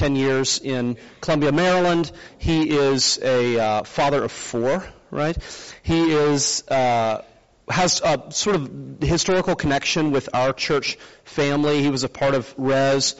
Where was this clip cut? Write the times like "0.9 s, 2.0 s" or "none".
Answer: none